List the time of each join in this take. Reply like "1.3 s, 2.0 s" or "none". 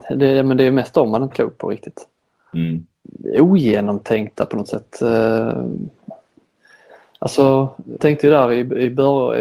1.3 s, 8.0 s